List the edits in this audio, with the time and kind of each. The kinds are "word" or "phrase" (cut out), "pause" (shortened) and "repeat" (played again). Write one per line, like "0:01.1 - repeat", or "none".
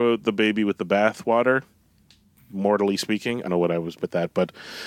0:03.5 - word
0:04.0 - word